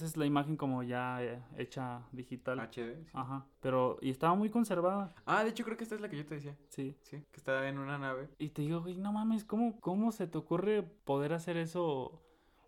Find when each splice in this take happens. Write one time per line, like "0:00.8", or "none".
0:03.5
0:08.3